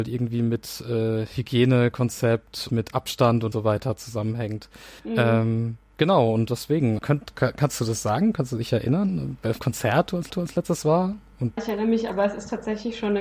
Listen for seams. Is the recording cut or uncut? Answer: cut